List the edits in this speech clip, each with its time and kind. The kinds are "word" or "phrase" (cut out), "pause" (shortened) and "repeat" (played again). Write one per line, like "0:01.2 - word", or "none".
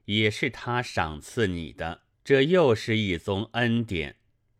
0:02.1 - pause

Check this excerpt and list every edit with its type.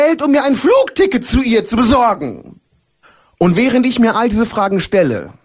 0:03.0 - pause

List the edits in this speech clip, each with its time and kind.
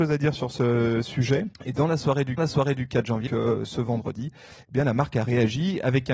0:01.5 - pause
0:02.4 - repeat
0:03.3 - word

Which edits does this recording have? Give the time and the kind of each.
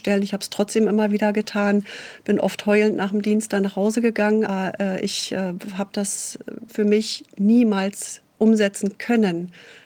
0:04.5 - word
0:06.7 - word
0:08.3 - pause

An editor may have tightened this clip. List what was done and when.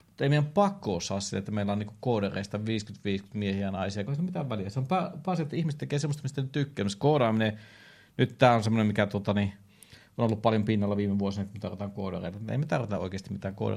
0:04.1 - phrase

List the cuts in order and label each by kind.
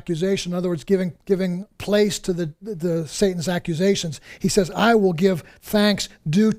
0:01.2 - pause

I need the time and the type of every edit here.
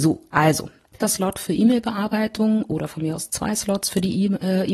0:01.0 - phrase

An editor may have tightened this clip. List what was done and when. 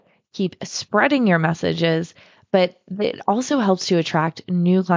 none

